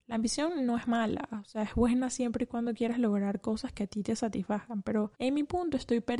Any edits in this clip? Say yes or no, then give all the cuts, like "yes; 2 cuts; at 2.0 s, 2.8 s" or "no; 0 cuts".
yes; 1 cut; at 5.1 s